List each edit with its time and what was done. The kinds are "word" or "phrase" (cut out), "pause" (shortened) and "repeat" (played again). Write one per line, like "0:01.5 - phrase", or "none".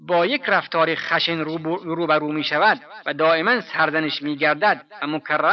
none